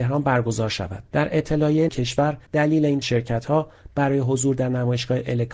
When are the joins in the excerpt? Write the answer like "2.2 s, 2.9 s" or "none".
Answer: 1.1 s, 1.9 s, 2.5 s, 3.0 s